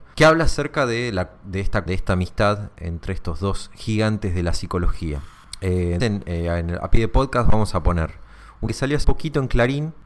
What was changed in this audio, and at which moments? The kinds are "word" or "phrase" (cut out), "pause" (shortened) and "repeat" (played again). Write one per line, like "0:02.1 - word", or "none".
0:01.9 - word
0:06.0 - word
0:08.7 - word
0:09.0 - word

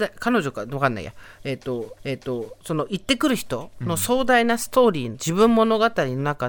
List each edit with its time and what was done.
0:02.0 - repeat

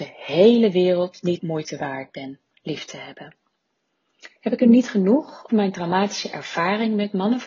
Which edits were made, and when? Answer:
0:01.4 - word
0:04.4 - pause
0:05.5 - word

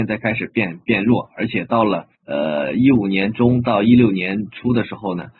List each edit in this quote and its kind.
0:02.1 - pause

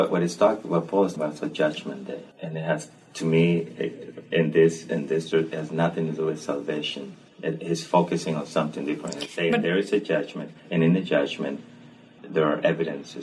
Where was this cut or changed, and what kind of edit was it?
0:01.2 - word
0:02.3 - pause
0:05.3 - word
0:07.3 - pause
0:10.6 - pause
0:12.2 - word

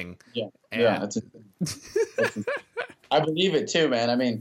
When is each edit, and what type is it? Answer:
none

